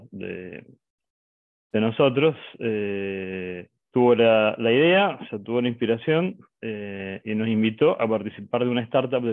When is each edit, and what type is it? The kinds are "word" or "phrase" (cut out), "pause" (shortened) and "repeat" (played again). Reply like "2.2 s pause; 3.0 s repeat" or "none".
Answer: 3.8 s pause